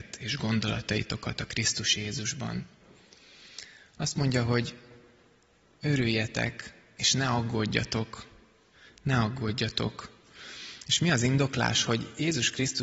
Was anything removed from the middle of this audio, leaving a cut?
no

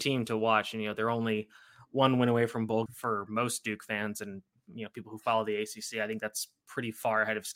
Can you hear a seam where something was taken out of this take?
yes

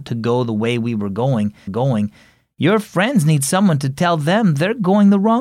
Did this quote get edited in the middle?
yes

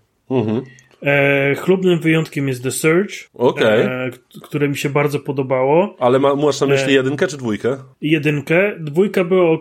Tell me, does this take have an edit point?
yes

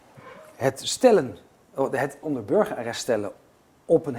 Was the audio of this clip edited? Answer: yes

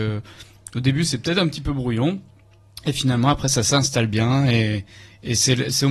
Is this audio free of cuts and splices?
yes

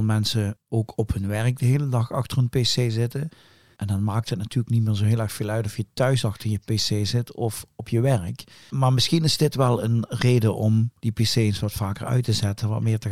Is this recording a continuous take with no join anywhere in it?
yes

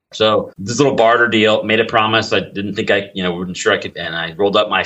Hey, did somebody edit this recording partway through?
yes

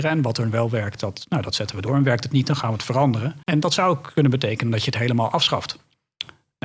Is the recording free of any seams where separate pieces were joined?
no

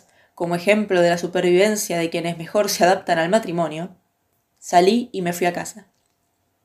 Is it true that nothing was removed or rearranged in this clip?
yes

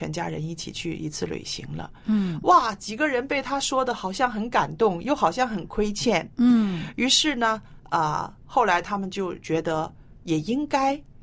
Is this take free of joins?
yes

